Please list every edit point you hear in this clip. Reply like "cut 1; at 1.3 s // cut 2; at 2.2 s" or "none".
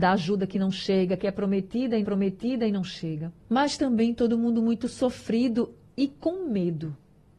cut 1; at 2.0 s // cut 2; at 3.4 s